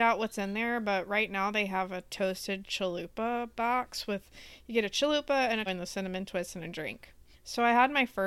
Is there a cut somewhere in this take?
yes; 3 cuts; at 2.6 s, 5.7 s, 7.3 s

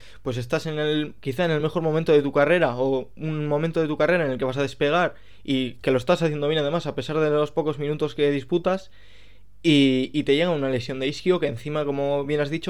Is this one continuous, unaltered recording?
yes; 0 cuts

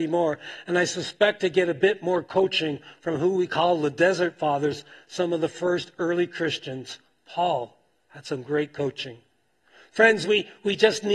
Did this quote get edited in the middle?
no; 0 cuts

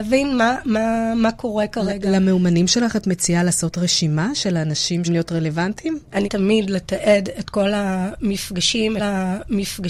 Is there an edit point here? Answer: yes; 3 cuts; at 5.0 s, 6.2 s, 9.0 s

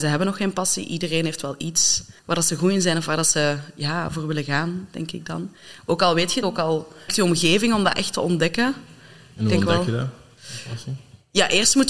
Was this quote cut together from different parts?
yes; 3 cuts; at 2.2 s, 6.4 s, 7.1 s

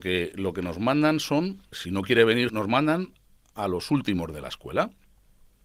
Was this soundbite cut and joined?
yes; 2 cuts; at 1.7 s, 2.5 s

